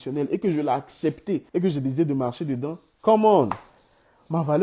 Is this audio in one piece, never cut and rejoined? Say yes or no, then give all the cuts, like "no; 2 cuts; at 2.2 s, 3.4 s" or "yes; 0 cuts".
no; 1 cut; at 1.5 s